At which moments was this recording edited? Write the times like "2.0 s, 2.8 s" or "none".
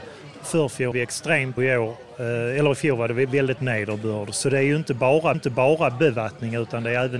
0.9 s, 1.6 s, 3.6 s, 5.3 s